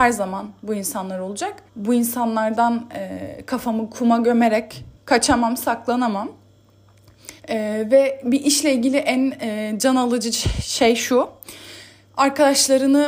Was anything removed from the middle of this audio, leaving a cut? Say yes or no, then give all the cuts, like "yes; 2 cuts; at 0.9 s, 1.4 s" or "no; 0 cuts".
yes; 3 cuts; at 1.7 s, 5.0 s, 7.4 s